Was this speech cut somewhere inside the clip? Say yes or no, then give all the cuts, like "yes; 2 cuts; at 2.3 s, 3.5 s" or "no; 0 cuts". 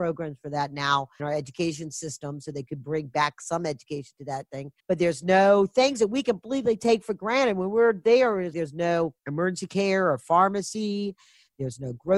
yes; 4 cuts; at 1.2 s, 4.8 s, 8.5 s, 9.2 s